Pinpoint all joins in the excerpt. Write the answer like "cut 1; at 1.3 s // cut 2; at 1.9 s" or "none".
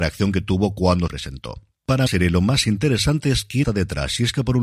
cut 1; at 1.1 s // cut 2; at 2.1 s // cut 3; at 3.6 s